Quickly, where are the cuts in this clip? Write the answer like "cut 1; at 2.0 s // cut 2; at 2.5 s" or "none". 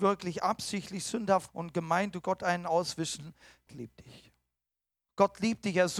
cut 1; at 1.5 s // cut 2; at 2.2 s // cut 3; at 3.7 s